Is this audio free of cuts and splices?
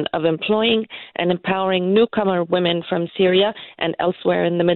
yes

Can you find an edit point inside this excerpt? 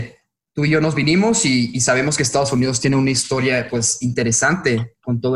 no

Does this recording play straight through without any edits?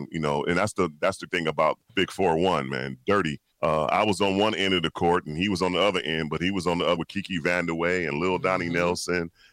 no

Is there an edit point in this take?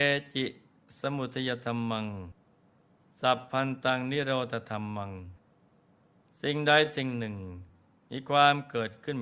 no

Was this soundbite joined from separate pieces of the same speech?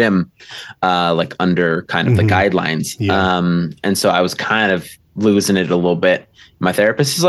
no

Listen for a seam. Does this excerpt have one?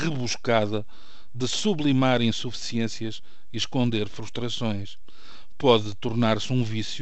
no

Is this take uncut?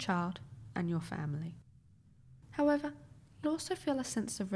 no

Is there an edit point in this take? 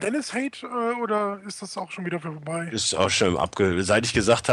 no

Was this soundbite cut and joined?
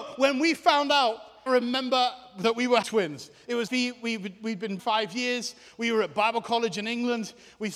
yes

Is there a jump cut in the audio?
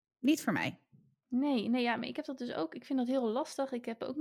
no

